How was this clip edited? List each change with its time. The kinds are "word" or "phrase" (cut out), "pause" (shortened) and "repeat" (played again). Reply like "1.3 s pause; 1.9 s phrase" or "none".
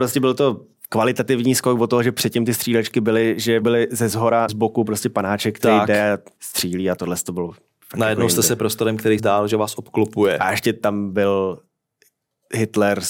3.6 s word; 4.5 s word; 6.4 s word; 7.0 s word; 8.6 s word; 9.2 s word